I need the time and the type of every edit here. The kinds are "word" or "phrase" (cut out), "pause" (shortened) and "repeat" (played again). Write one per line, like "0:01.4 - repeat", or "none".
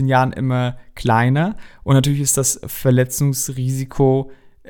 none